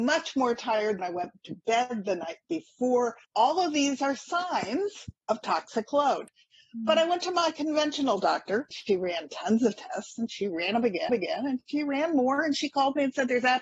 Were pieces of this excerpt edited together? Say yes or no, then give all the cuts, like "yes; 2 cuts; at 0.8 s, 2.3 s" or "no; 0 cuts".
yes; 5 cuts; at 1.0 s, 3.2 s, 5.2 s, 8.7 s, 11.1 s